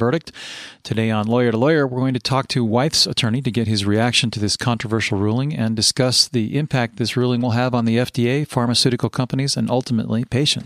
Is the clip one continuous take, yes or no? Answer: yes